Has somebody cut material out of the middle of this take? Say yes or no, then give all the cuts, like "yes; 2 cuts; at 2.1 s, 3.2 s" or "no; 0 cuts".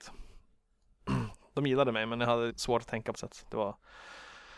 yes; 2 cuts; at 2.5 s, 3.1 s